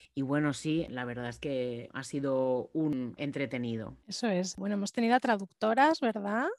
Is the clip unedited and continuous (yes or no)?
no